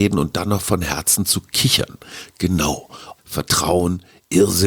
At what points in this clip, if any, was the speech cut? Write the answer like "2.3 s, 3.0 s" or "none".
3.2 s